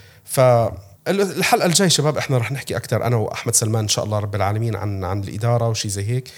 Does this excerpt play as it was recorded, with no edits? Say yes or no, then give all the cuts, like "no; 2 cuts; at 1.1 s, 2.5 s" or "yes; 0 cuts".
no; 1 cut; at 1.0 s